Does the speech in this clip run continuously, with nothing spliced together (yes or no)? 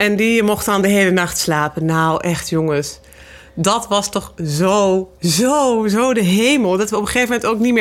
yes